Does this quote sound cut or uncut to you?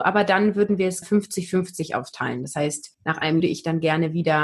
cut